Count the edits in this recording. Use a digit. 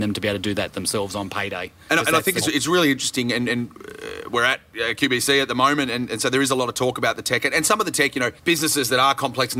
2